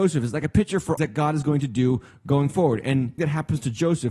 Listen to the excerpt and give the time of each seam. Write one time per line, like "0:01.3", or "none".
0:01.0
0:03.2